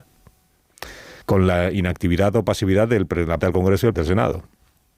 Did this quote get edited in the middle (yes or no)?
yes